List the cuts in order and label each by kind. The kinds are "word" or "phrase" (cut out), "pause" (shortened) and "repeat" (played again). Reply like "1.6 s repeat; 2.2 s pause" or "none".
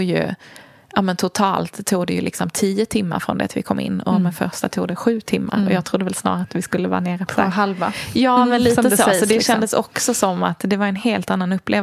7.3 s word